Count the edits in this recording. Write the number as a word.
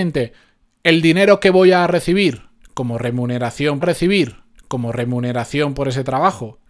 one